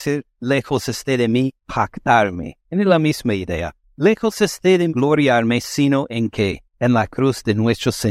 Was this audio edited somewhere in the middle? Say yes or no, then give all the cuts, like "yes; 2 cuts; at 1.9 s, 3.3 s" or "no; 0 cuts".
yes; 3 cuts; at 2.6 s, 4.9 s, 6.7 s